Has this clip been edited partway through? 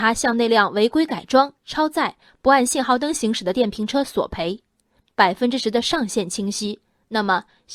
no; 0 cuts

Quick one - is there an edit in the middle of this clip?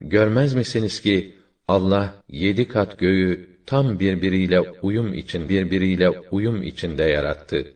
yes; 2 cuts; at 2.2 s, 5.5 s

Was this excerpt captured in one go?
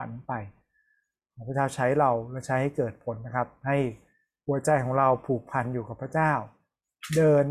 yes; 0 cuts

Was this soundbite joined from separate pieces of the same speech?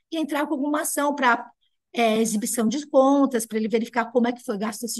no; 0 cuts

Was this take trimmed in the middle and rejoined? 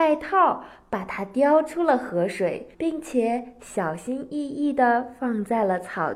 yes; 1 cut; at 2.7 s

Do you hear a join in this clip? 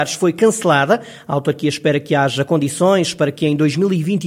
no; 0 cuts

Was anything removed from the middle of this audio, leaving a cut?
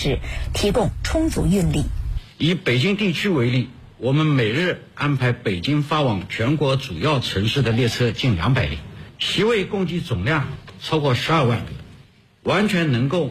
yes; 2 cuts; at 2.3 s, 9.1 s

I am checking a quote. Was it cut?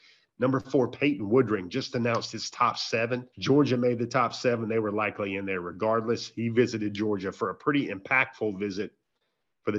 yes; 1 cut; at 3.3 s

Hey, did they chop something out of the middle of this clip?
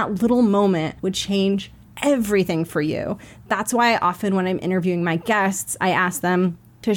yes; 2 cuts; at 1.0 s, 1.8 s

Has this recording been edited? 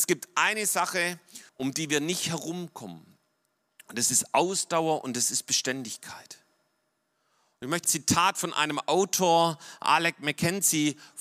yes; 2 cuts; at 1.5 s, 7.8 s

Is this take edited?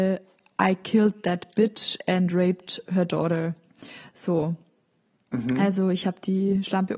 no; 0 cuts

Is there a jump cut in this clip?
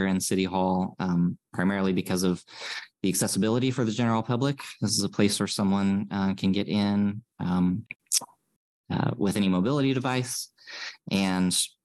no; 0 cuts

